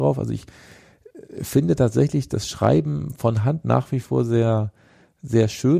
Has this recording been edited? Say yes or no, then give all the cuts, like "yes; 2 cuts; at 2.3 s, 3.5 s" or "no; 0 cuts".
no; 0 cuts